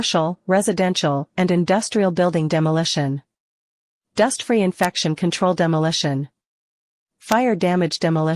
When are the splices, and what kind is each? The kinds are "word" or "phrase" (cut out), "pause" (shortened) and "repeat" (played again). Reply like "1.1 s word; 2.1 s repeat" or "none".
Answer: none